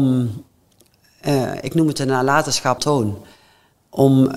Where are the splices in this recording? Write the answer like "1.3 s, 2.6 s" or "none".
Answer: 2.8 s